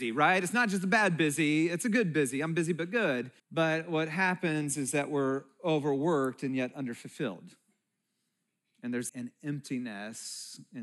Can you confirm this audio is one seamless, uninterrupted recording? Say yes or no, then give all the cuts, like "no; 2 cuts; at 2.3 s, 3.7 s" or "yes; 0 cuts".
no; 2 cuts; at 3.4 s, 9.1 s